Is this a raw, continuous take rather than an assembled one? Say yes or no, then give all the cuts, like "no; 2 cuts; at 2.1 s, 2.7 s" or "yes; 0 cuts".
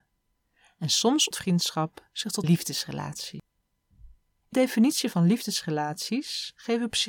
no; 3 cuts; at 1.3 s, 2.4 s, 4.5 s